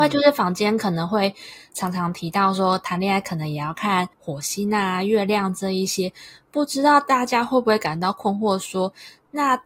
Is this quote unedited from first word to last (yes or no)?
no